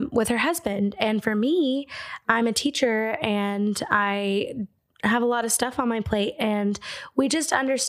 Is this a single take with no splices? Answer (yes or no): yes